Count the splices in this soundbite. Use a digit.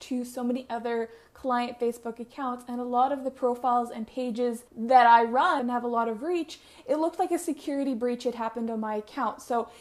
2